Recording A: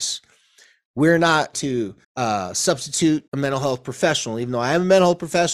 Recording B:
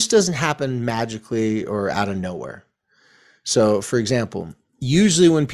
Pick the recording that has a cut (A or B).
A